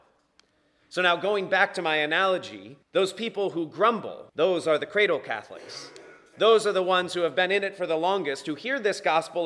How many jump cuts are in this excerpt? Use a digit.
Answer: 2